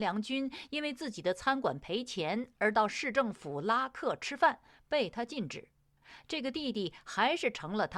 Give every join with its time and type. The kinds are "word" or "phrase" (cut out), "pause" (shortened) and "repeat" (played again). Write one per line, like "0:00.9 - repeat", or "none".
none